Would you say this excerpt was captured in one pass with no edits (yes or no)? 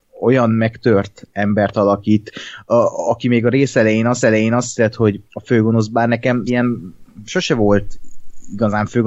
no